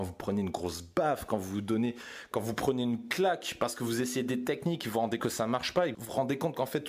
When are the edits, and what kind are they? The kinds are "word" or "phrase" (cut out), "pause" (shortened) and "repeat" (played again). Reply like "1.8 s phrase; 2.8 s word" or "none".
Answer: 5.2 s word; 5.9 s word